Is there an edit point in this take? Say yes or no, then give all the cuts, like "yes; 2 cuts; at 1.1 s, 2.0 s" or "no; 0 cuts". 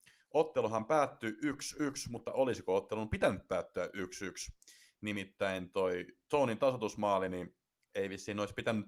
no; 0 cuts